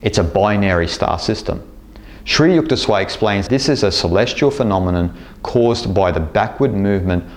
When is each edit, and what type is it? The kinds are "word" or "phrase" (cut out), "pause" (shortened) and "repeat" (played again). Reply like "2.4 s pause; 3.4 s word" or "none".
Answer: 3.5 s word